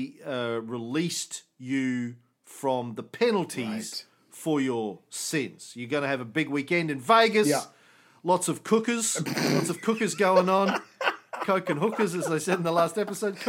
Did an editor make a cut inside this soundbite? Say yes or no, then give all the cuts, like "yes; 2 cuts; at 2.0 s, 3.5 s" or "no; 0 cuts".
no; 0 cuts